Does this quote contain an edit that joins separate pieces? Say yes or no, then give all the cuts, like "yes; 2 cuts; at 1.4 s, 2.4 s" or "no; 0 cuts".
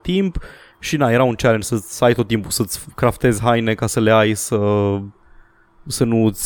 no; 0 cuts